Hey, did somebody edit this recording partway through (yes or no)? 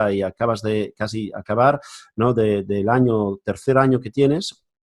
no